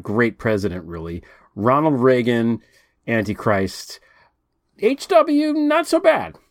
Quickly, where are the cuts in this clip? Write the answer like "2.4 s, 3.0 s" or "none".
none